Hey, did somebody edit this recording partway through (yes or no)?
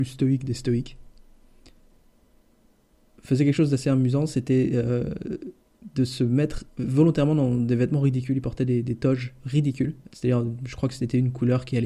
yes